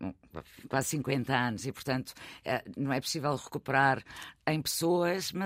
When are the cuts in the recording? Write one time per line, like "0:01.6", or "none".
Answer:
none